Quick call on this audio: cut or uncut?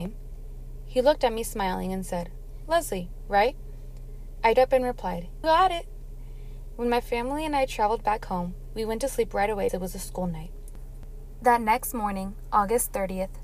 cut